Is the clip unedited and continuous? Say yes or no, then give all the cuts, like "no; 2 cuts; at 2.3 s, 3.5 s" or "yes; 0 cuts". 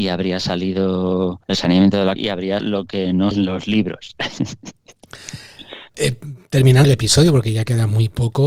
no; 6 cuts; at 1.4 s, 2.2 s, 2.6 s, 3.3 s, 5.9 s, 6.8 s